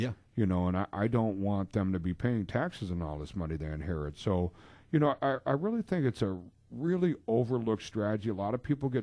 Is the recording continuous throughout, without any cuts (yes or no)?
yes